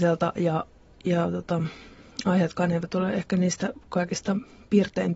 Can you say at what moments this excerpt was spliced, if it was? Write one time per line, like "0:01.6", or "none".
none